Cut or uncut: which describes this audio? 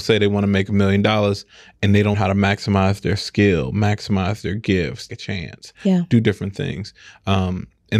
cut